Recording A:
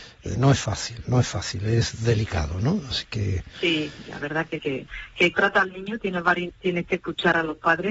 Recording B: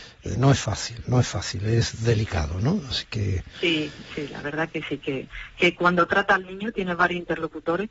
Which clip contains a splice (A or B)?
A